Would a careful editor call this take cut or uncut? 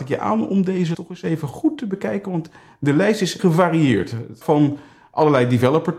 cut